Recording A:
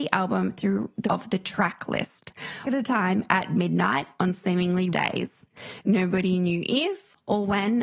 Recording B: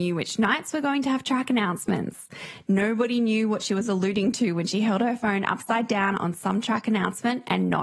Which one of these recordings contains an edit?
A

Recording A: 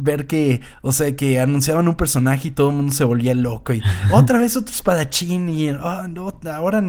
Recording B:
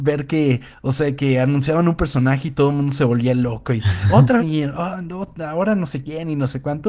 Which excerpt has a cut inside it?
B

